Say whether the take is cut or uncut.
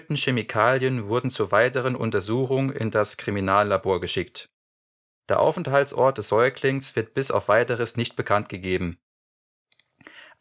uncut